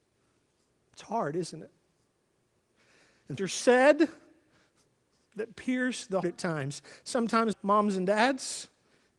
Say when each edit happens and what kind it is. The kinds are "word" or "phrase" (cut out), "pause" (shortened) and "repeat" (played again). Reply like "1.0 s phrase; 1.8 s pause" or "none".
3.4 s word; 6.2 s word; 7.5 s word